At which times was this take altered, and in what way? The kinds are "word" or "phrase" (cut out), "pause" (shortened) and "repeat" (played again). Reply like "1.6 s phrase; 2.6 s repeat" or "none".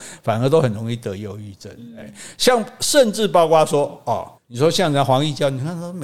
4.3 s pause